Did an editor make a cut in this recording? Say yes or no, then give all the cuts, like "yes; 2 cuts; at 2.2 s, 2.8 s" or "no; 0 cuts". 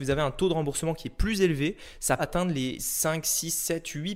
yes; 2 cuts; at 2.2 s, 2.8 s